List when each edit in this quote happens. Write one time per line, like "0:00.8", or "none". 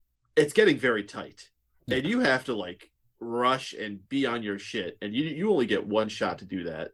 none